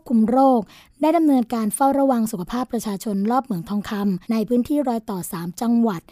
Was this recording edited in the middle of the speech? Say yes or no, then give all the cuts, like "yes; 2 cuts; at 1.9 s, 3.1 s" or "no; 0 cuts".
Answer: yes; 1 cut; at 4.2 s